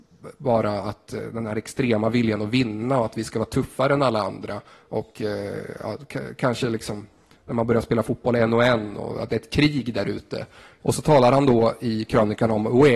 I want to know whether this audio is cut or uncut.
uncut